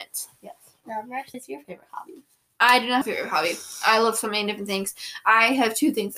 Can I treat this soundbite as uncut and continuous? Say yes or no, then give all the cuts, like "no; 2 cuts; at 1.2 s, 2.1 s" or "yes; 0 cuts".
no; 2 cuts; at 1.3 s, 3.0 s